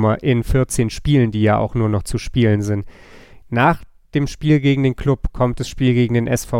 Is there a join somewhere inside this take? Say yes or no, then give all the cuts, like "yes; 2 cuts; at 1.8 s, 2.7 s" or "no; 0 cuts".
no; 0 cuts